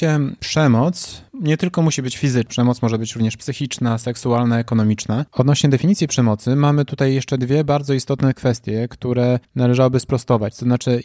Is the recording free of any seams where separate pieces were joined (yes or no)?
no